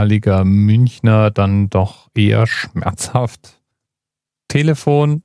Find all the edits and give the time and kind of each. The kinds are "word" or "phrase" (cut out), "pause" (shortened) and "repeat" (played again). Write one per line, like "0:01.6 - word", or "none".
none